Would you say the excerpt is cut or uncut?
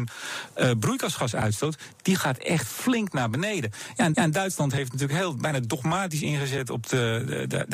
cut